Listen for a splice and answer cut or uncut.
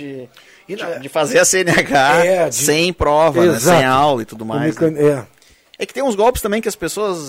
uncut